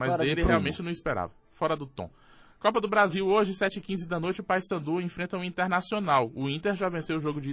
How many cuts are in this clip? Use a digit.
0